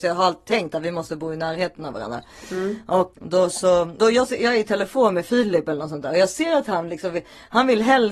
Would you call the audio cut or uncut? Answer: cut